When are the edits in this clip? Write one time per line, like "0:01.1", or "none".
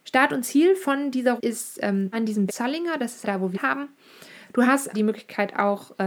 0:01.4
0:02.1
0:02.5
0:03.2
0:03.5
0:04.9